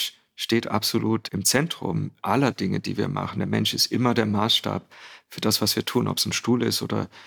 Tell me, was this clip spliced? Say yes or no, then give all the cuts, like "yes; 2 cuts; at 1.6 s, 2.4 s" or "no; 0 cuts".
no; 0 cuts